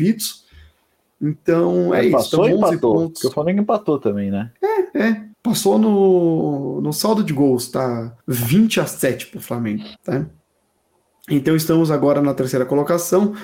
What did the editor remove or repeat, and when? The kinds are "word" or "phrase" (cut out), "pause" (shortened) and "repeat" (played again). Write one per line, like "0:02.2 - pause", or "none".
0:05.3 - pause
0:08.2 - pause
0:10.0 - pause